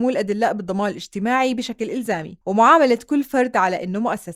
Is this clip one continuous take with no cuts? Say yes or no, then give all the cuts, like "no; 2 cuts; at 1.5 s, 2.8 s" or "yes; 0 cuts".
no; 1 cut; at 2.4 s